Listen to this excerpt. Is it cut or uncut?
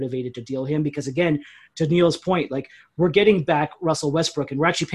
uncut